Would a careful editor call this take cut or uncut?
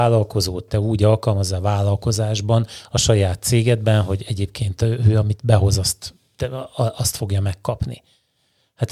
uncut